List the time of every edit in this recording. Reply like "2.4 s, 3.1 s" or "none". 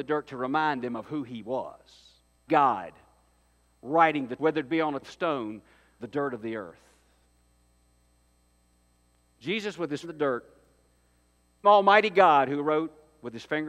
2.5 s, 4.4 s, 5.0 s, 6.0 s, 10.0 s, 11.6 s